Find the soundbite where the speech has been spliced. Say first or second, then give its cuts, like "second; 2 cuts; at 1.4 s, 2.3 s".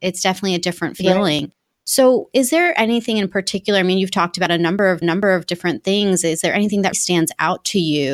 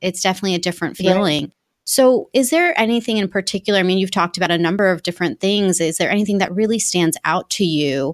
first; 2 cuts; at 5.0 s, 6.9 s